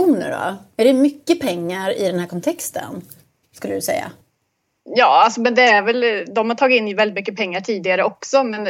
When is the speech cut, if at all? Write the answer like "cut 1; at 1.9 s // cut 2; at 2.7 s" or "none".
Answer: none